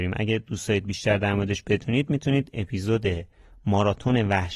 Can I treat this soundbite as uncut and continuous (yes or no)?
yes